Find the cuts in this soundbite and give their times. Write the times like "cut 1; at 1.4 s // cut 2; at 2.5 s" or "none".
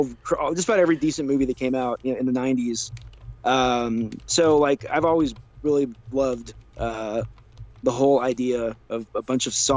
none